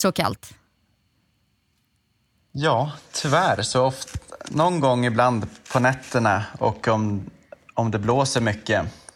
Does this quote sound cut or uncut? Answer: uncut